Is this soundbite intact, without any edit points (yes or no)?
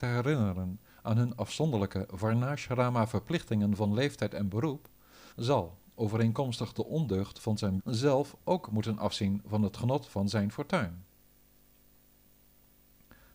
no